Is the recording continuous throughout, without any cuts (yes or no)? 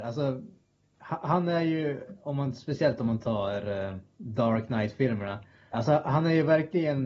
no